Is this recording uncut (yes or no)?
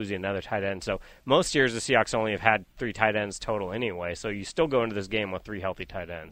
yes